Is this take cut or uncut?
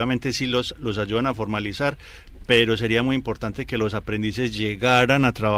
uncut